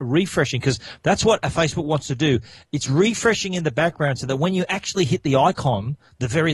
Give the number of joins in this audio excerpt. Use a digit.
0